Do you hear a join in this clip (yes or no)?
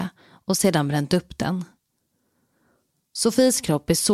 no